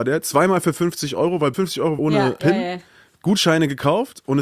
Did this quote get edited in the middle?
yes; 2 cuts; at 1.5 s, 2.0 s

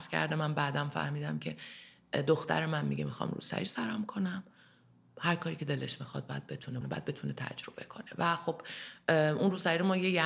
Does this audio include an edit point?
yes; 1 cut; at 6.8 s

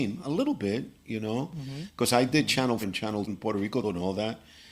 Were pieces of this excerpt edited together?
yes; 3 cuts; at 2.8 s, 3.3 s, 3.8 s

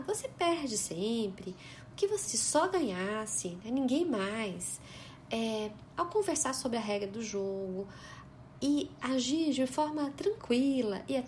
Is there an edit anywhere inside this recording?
yes; 1 cut; at 2.3 s

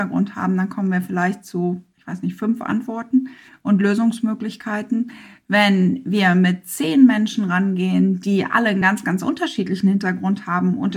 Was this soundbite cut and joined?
no; 0 cuts

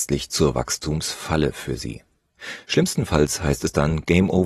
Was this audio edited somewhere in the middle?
no; 0 cuts

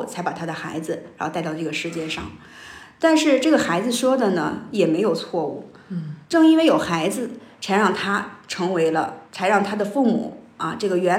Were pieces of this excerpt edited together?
yes; 2 cuts; at 6.2 s, 9.3 s

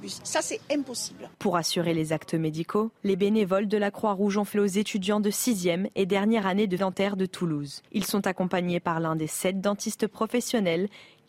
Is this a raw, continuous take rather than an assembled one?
no; 5 cuts; at 1.3 s, 3.0 s, 4.5 s, 6.8 s, 7.9 s

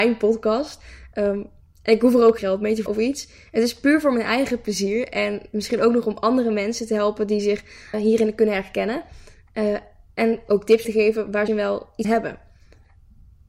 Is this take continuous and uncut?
no; 6 cuts; at 2.4 s, 2.9 s, 7.9 s, 10.8 s, 11.5 s, 12.0 s

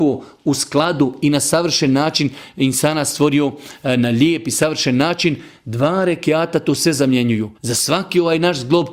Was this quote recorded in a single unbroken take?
no; 1 cut; at 7.5 s

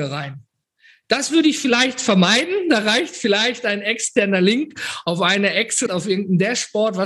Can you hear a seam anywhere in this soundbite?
yes; 1 cut; at 5.9 s

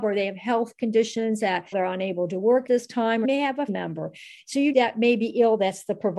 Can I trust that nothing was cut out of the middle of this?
no; 5 cuts; at 1.7 s, 2.7 s, 3.2 s, 3.7 s, 4.7 s

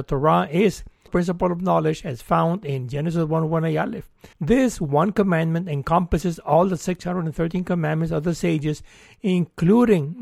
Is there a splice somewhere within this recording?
yes; 2 cuts; at 1.1 s, 4.3 s

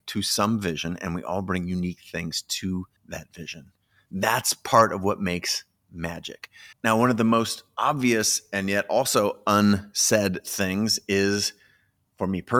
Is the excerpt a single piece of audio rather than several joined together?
no; 2 cuts; at 3.0 s, 6.7 s

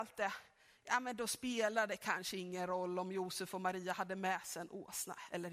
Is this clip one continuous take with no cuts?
yes; 0 cuts

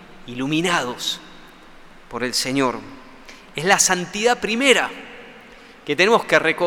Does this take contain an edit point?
no; 0 cuts

